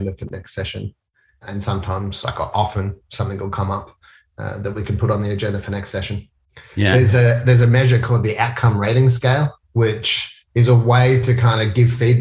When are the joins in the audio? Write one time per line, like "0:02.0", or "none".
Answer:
0:09.6